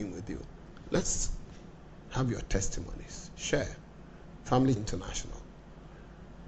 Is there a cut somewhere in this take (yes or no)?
yes